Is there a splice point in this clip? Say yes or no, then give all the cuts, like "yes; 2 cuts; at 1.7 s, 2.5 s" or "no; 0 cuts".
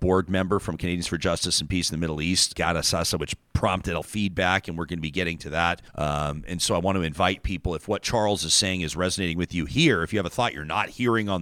yes; 3 cuts; at 2.5 s, 4.0 s, 5.9 s